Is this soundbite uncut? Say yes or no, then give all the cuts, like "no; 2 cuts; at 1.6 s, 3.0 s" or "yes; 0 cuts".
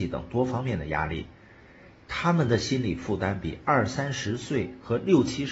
yes; 0 cuts